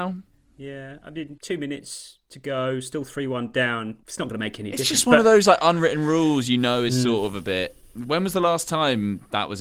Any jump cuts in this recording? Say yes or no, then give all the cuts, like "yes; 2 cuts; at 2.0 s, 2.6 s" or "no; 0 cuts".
no; 0 cuts